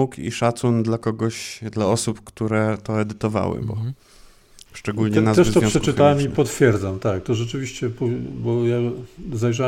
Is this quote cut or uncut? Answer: uncut